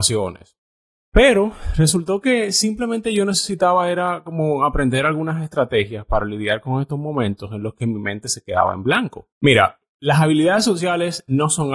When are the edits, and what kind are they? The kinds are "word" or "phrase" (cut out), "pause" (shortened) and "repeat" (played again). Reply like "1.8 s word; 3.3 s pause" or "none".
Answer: 9.3 s pause